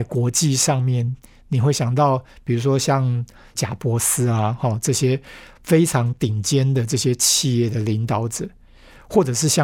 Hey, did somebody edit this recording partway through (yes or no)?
no